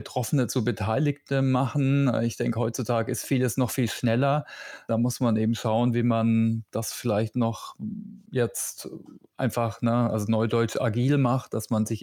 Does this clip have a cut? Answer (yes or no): yes